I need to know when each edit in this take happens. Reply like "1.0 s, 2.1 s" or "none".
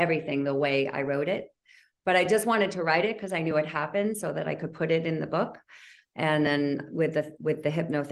none